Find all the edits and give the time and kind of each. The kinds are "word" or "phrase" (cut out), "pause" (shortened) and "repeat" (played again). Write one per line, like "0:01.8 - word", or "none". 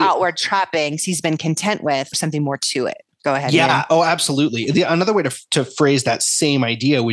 0:02.1 - phrase